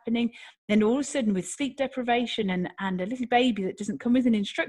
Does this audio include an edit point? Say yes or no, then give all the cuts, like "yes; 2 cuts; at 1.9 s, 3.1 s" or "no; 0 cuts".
no; 0 cuts